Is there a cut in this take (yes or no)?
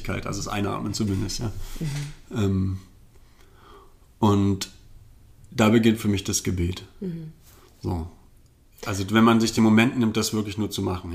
no